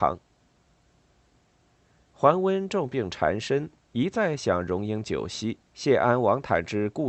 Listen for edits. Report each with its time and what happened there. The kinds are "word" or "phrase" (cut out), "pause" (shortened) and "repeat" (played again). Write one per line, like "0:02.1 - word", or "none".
0:05.7 - pause